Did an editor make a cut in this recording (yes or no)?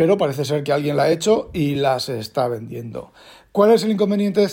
no